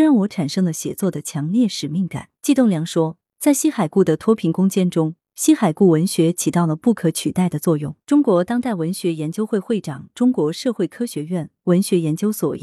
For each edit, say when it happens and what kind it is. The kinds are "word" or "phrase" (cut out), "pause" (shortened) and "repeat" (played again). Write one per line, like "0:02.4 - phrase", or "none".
0:02.4 - pause
0:08.0 - pause

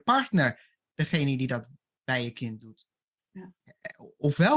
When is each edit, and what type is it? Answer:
none

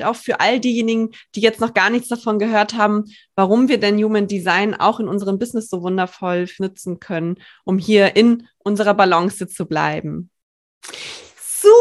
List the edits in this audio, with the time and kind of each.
0:06.6 - word

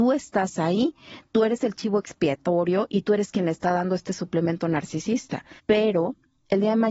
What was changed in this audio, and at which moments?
0:05.6 - pause

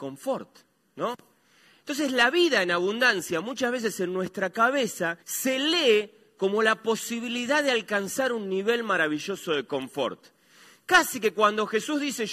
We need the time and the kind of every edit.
0:05.2 - pause

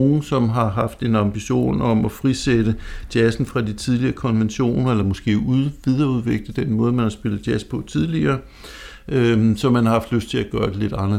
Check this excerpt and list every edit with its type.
none

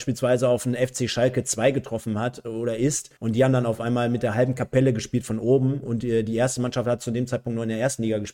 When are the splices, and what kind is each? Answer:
0:03.2 - pause

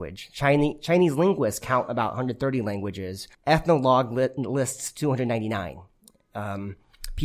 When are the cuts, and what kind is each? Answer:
0:03.3 - pause

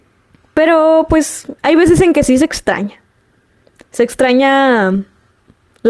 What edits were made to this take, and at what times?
0:01.6 - pause

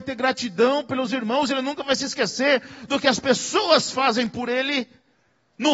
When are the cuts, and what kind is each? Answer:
none

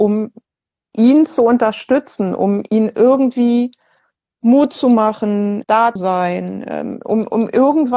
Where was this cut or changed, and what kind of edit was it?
0:05.6 - word
0:06.0 - word

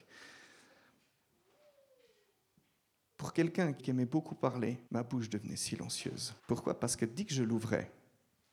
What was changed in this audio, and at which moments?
0:03.8 - phrase
0:04.9 - pause
0:06.4 - pause

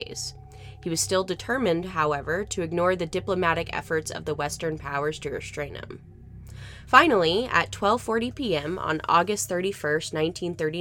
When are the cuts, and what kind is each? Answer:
none

